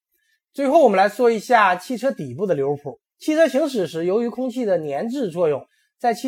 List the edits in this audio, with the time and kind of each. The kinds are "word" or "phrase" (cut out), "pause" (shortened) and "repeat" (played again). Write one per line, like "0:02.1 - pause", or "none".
0:03.1 - pause